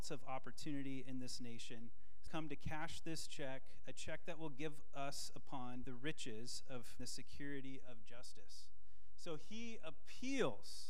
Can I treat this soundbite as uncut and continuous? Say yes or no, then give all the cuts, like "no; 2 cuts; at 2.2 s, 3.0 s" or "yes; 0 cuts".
no; 3 cuts; at 2.3 s, 5.8 s, 7.0 s